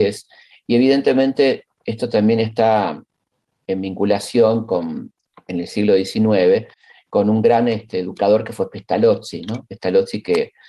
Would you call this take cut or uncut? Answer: uncut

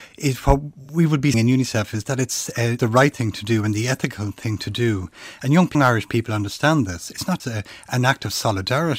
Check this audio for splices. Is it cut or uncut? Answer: cut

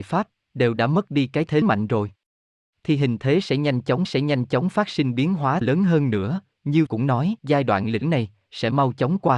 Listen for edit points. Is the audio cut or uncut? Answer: cut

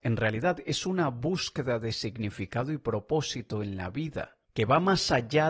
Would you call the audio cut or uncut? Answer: cut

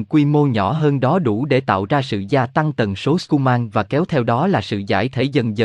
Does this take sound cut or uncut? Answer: uncut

